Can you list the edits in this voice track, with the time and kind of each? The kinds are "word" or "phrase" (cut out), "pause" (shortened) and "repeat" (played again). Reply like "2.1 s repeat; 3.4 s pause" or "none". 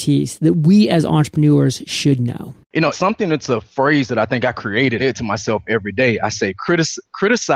2.6 s pause; 2.9 s word; 5.0 s phrase